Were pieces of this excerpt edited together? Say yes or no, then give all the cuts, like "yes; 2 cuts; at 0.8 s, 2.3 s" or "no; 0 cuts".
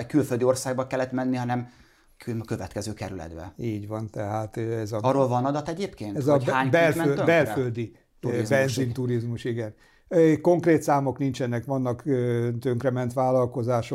no; 0 cuts